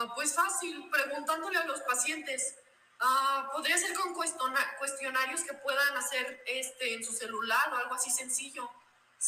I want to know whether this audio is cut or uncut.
uncut